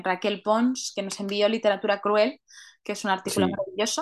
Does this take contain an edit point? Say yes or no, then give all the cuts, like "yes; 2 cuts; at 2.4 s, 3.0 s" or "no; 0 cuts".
no; 0 cuts